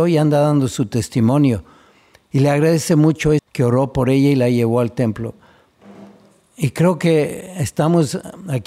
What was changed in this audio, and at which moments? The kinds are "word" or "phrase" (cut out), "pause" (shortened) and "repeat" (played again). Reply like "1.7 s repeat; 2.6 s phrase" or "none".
3.4 s phrase